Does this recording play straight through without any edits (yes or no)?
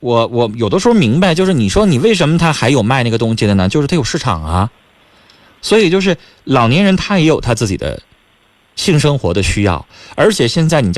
yes